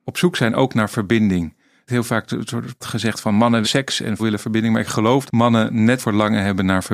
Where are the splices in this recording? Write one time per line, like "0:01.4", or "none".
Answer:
0:01.9
0:02.8
0:03.6
0:04.2
0:05.3
0:06.0